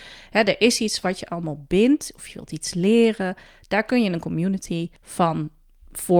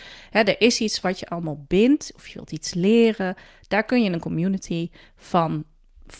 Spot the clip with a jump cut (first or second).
first